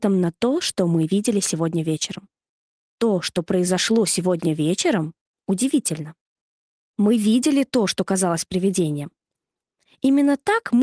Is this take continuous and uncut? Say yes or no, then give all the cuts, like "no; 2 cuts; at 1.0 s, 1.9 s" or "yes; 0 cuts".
yes; 0 cuts